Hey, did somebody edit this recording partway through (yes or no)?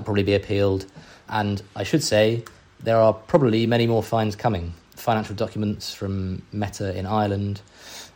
no